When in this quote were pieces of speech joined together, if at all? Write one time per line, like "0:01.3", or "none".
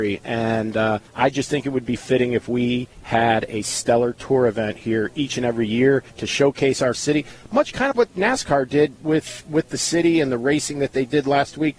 0:01.1
0:02.9
0:06.1
0:06.9
0:07.9

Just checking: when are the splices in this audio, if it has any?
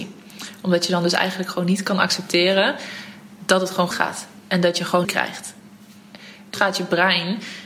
0:03.9
0:05.0
0:06.5

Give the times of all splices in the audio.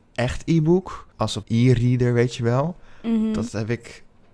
0:01.1
0:01.4

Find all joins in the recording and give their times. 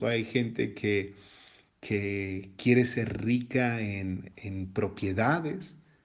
0:04.3

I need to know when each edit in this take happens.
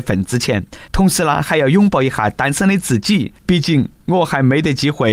0:03.4

